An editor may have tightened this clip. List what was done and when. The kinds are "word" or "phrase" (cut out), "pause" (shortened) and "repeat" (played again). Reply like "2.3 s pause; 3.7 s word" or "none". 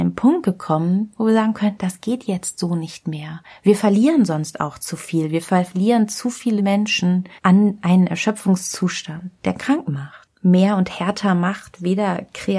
6.6 s word; 7.4 s pause